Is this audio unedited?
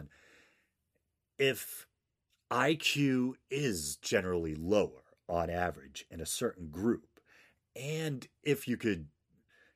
yes; 0 cuts

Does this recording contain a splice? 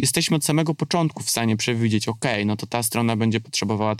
no; 0 cuts

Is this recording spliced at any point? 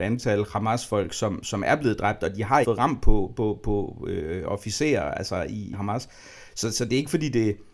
yes; 3 cuts; at 2.6 s, 3.6 s, 5.7 s

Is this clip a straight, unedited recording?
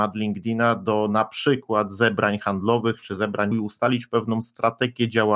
no; 1 cut; at 3.5 s

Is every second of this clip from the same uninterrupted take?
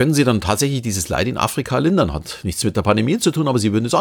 yes; 0 cuts

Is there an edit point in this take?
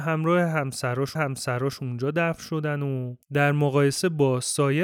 yes; 2 cuts; at 1.2 s, 3.2 s

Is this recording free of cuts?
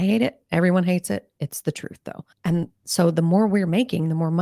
no; 1 cut; at 2.3 s

